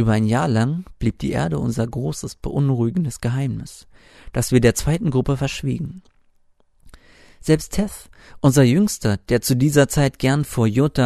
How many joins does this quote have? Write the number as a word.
zero